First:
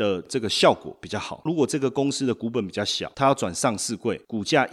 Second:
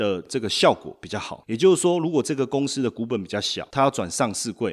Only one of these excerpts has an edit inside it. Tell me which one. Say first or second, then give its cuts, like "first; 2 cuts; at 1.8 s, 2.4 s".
first; 1 cut; at 1.5 s